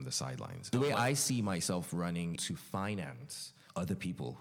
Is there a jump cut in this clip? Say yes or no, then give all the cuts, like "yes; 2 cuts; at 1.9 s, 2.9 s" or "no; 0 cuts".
yes; 1 cut; at 2.4 s